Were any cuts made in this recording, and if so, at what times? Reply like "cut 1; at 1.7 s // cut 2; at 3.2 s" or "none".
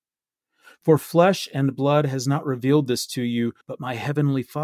cut 1; at 3.6 s